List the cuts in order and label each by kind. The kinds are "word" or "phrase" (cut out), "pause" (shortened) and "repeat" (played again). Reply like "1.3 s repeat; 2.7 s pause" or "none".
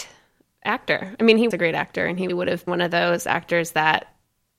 1.5 s word; 2.3 s word; 2.7 s word